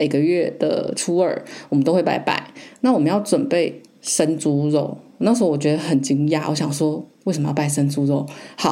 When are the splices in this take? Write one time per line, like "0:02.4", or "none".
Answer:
none